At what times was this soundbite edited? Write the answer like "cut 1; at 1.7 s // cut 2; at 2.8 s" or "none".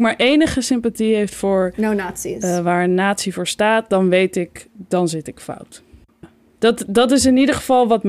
none